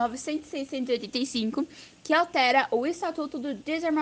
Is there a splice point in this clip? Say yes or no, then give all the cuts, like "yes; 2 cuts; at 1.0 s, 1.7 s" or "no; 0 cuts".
no; 0 cuts